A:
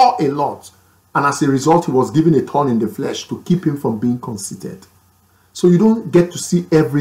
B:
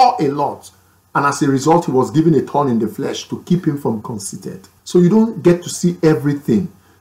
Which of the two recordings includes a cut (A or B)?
B